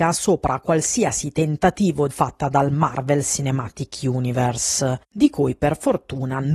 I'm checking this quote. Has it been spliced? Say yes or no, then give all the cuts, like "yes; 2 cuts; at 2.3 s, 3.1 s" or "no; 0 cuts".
yes; 1 cut; at 2.1 s